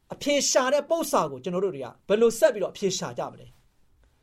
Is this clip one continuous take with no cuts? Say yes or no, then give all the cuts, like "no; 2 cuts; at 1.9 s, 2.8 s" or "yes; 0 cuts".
no; 1 cut; at 2.0 s